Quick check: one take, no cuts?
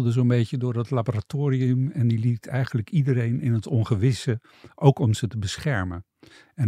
yes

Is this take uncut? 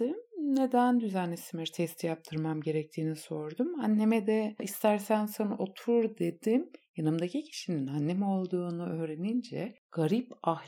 yes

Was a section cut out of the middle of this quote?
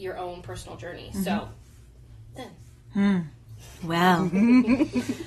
yes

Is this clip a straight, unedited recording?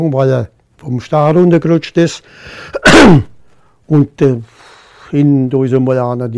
yes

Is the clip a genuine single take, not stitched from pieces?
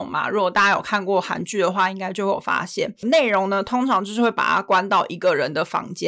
yes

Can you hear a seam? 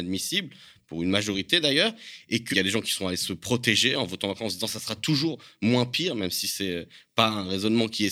yes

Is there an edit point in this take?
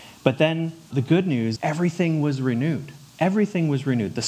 yes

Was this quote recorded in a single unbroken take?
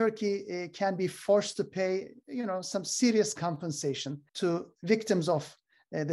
no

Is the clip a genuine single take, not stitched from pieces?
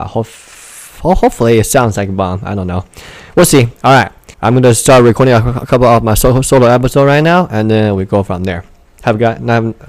no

